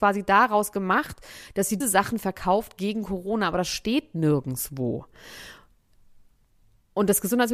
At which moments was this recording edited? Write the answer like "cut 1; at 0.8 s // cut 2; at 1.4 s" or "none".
cut 1; at 1.8 s